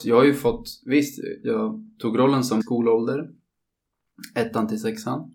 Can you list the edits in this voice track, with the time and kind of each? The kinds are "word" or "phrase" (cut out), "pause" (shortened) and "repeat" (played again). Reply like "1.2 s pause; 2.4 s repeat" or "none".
2.6 s phrase